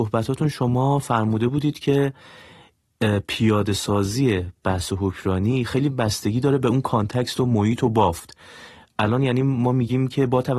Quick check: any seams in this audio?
no; 0 cuts

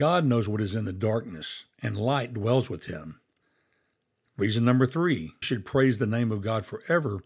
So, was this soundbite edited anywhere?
yes; 1 cut; at 5.4 s

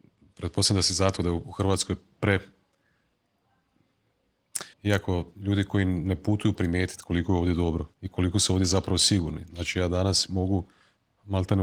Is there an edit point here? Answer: yes; 4 cuts; at 1.2 s, 4.7 s, 6.5 s, 7.9 s

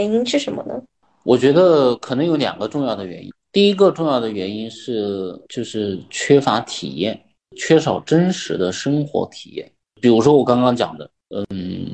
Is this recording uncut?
no; 1 cut; at 5.4 s

